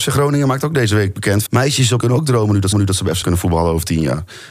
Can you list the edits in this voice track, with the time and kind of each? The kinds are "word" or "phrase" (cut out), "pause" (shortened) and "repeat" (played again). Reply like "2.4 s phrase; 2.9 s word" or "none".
1.5 s word; 2.0 s word; 2.7 s repeat; 3.2 s word

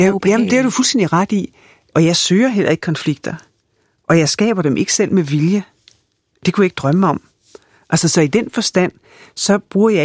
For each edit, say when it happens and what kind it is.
none

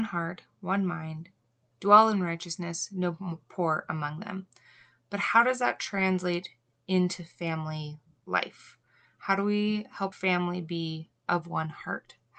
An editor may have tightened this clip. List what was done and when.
10.1 s word

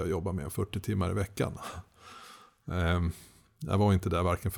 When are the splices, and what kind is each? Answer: none

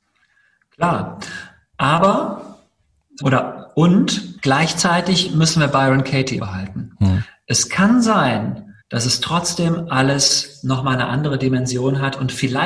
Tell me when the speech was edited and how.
3.2 s word; 4.4 s pause; 6.4 s word; 8.8 s pause

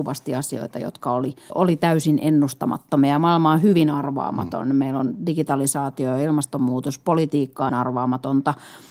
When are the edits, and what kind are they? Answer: 1.5 s word; 7.7 s word

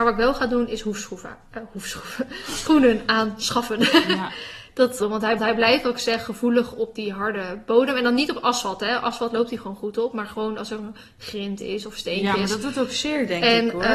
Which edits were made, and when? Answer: 2.7 s word; 5.0 s phrase; 5.4 s repeat

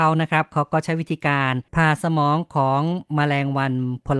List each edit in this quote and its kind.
1.7 s pause

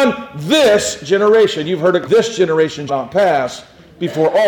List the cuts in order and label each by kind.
2.1 s word; 2.9 s word

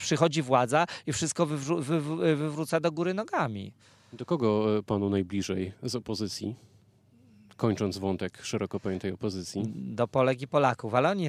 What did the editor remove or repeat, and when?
none

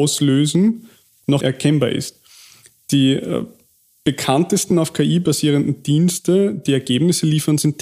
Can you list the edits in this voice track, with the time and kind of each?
none

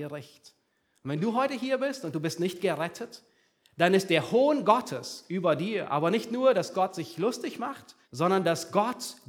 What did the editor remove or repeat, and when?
8.0 s pause

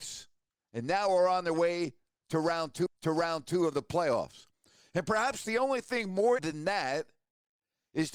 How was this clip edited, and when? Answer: 2.9 s repeat; 6.4 s word

